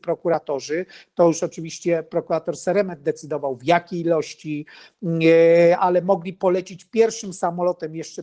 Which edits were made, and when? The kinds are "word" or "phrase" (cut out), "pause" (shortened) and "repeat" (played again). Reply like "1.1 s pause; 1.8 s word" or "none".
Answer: none